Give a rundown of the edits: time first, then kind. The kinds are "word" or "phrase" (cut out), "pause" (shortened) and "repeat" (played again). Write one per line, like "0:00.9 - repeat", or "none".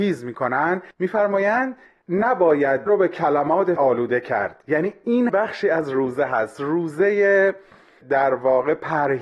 0:00.9 - pause
0:02.9 - word
0:03.8 - word
0:05.3 - word